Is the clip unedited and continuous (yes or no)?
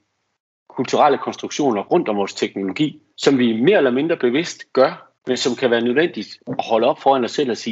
no